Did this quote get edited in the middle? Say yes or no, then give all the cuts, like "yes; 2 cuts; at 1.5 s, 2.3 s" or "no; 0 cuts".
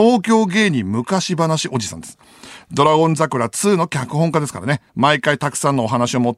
yes; 1 cut; at 4.9 s